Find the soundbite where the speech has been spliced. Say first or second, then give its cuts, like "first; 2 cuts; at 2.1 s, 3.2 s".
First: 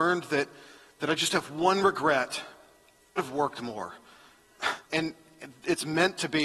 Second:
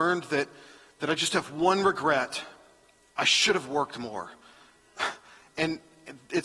first; 2 cuts; at 3.2 s, 4.8 s